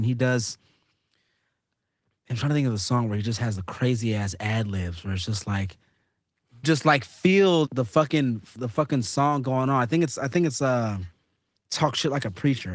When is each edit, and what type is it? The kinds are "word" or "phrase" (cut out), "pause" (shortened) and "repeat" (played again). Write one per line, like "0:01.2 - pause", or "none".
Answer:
0:06.6 - word
0:07.7 - word
0:08.6 - word

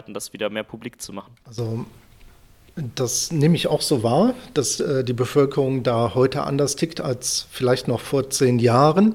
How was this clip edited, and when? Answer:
0:01.4 - pause

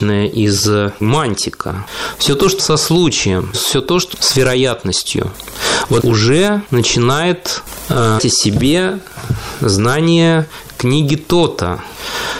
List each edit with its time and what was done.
0:01.0 - word
0:02.6 - word
0:03.5 - word
0:04.1 - word
0:06.0 - word
0:08.2 - word

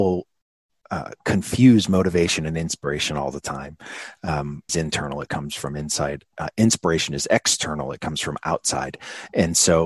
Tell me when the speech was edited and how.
0:04.7 - phrase

